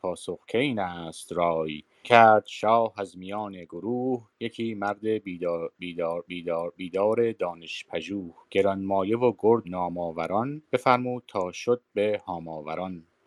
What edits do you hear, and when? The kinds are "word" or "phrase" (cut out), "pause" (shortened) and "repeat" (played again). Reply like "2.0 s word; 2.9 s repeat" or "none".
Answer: 2.0 s word; 6.3 s repeat; 8.4 s pause; 9.6 s word; 10.7 s pause